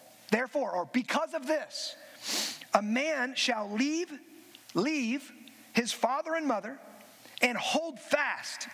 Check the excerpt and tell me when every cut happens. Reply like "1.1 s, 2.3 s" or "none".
4.6 s

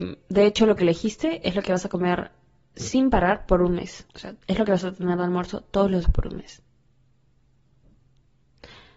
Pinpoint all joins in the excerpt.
4.1 s, 6.0 s

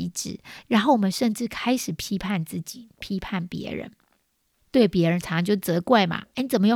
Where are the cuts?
none

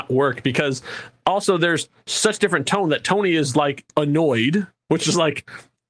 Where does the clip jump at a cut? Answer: none

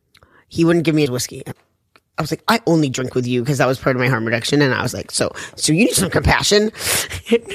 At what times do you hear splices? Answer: 1.1 s, 1.5 s, 6.0 s

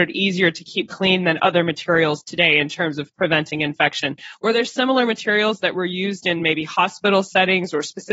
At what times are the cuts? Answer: none

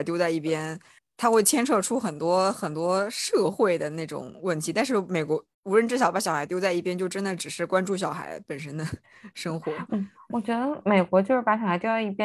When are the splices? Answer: 5.5 s

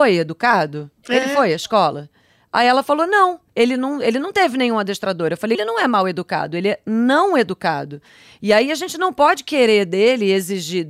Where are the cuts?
1.0 s, 3.5 s, 5.5 s

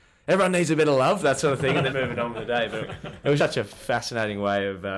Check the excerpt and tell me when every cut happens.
1.9 s, 3.4 s

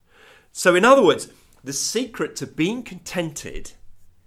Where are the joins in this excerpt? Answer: none

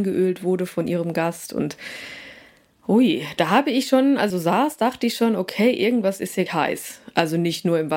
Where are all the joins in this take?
4.3 s, 6.5 s

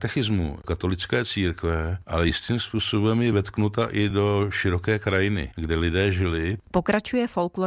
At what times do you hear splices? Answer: none

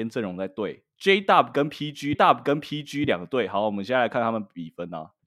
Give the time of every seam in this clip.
2.1 s

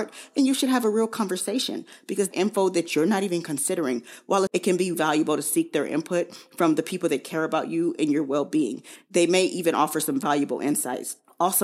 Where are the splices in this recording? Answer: 2.3 s, 4.5 s, 4.9 s

